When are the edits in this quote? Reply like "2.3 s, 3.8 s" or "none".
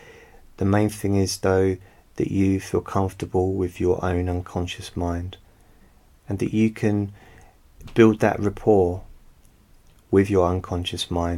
none